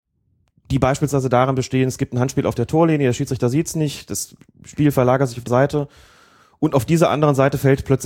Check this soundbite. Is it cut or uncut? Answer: cut